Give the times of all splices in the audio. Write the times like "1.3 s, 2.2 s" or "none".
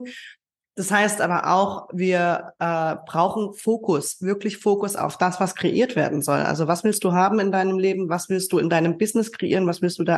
none